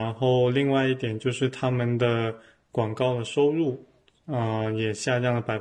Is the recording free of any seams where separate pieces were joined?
yes; 0 cuts

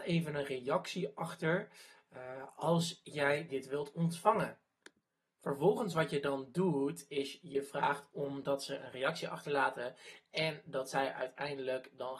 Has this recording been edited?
no; 0 cuts

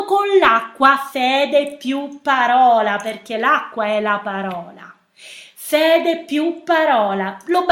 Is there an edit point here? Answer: no; 0 cuts

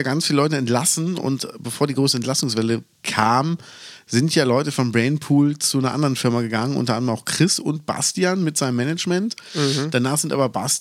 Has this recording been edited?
no; 0 cuts

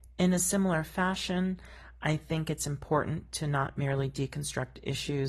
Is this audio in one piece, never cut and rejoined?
yes; 0 cuts

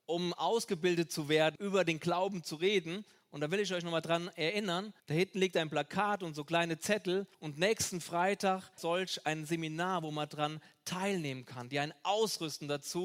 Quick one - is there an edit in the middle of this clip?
yes; 4 cuts; at 1.6 s, 5.0 s, 7.3 s, 8.8 s

